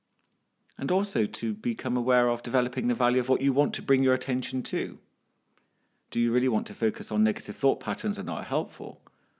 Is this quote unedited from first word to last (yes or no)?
yes